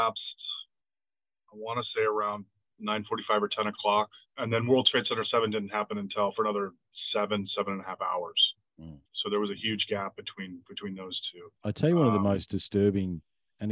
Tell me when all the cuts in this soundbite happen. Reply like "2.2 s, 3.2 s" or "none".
4.3 s, 9.0 s, 11.6 s